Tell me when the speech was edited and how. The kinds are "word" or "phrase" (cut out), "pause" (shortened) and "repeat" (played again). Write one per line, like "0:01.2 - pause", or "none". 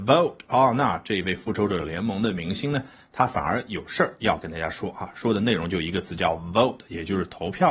none